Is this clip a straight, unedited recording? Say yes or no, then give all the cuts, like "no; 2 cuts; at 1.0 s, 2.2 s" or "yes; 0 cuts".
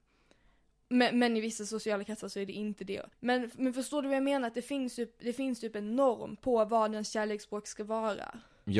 no; 1 cut; at 3.1 s